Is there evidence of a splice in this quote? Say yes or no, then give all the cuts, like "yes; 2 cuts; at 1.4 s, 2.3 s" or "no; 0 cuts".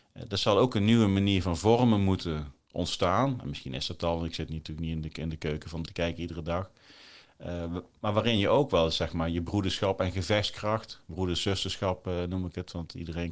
yes; 1 cut; at 5.8 s